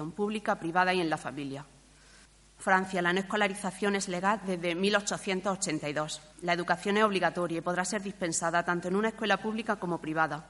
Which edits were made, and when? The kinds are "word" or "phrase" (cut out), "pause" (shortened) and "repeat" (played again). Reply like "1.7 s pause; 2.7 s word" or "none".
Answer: 2.3 s pause; 6.3 s pause